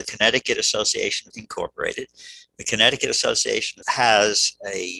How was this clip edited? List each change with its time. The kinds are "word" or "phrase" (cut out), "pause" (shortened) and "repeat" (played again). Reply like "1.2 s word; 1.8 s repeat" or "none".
1.3 s word; 3.8 s word